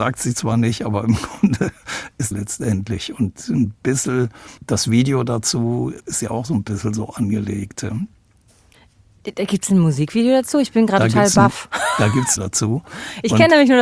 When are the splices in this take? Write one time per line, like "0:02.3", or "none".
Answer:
0:02.3
0:04.6
0:12.4